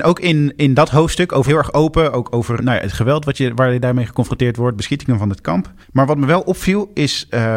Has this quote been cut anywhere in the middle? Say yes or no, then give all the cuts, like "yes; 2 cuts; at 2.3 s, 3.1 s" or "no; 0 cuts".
yes; 3 cuts; at 1.5 s, 2.6 s, 5.8 s